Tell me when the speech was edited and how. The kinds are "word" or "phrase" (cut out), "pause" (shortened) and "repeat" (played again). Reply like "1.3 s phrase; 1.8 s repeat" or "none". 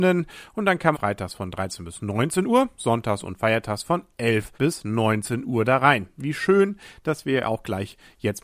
0.9 s phrase; 2.8 s word; 4.5 s pause